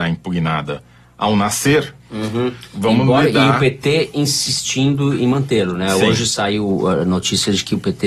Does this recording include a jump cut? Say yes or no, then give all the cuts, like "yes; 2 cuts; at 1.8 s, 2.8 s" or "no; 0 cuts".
no; 0 cuts